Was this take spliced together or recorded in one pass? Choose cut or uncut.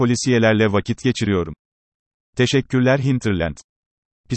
uncut